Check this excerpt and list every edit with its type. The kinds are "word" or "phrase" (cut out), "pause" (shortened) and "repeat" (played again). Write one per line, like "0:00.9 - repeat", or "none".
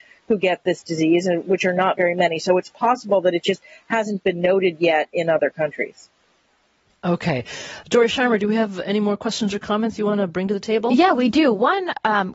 none